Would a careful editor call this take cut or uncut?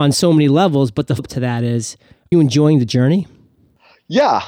cut